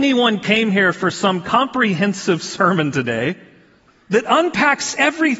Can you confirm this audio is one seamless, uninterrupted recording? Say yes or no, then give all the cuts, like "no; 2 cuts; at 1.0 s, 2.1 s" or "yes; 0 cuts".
yes; 0 cuts